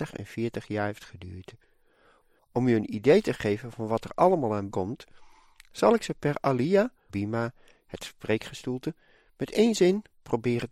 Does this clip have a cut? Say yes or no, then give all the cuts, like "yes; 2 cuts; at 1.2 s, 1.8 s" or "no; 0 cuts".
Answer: yes; 2 cuts; at 4.7 s, 7.1 s